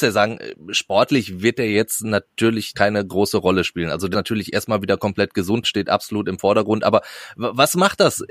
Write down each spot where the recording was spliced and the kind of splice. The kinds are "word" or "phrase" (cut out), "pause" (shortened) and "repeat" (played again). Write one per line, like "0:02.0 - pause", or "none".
0:02.7 - word
0:04.1 - word
0:05.6 - word